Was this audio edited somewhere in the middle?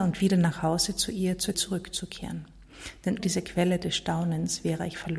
yes; 2 cuts; at 1.5 s, 3.2 s

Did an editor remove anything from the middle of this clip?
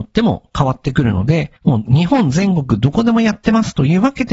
yes; 1 cut; at 1.6 s

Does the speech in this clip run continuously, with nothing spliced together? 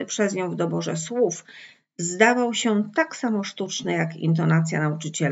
yes; 0 cuts

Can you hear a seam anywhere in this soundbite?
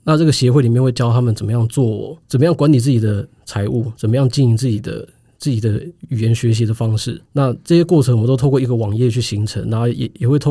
yes; 2 cuts; at 2.2 s, 7.3 s

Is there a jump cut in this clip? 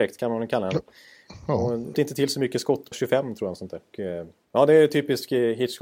yes; 3 cuts; at 1.9 s, 2.9 s, 3.9 s

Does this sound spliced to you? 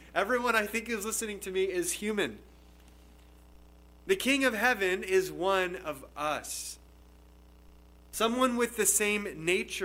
no; 0 cuts

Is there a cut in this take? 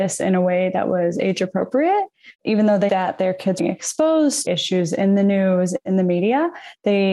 yes; 4 cuts; at 2.3 s, 2.9 s, 3.6 s, 4.4 s

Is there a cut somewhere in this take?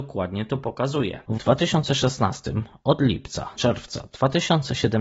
yes; 2 cuts; at 1.4 s, 3.6 s

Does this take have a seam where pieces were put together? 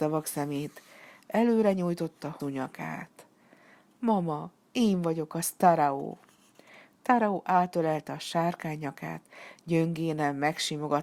yes; 1 cut; at 2.4 s

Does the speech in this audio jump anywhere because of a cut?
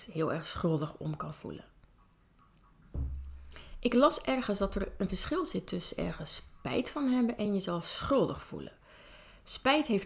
no; 0 cuts

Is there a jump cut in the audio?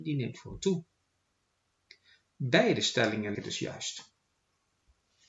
yes; 1 cut; at 3.3 s

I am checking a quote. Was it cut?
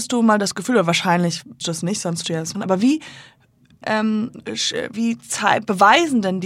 yes; 5 cuts; at 1.6 s, 2.2 s, 2.5 s, 3.8 s, 4.9 s

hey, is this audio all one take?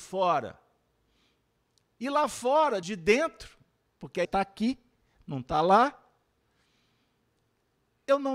no; 2 cuts; at 2.8 s, 4.2 s

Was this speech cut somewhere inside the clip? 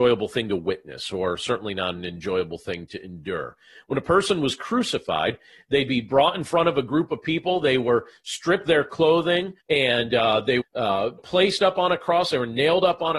yes; 4 cuts; at 8.7 s, 9.6 s, 10.6 s, 11.2 s

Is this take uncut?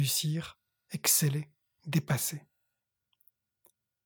yes; 0 cuts

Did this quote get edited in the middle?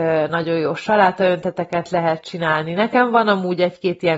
no; 0 cuts

